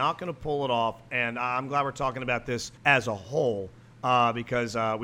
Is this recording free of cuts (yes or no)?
no